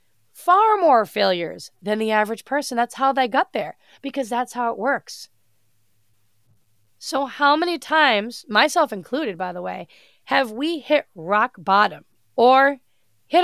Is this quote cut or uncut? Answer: uncut